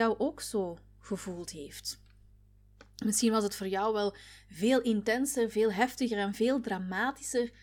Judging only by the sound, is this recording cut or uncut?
uncut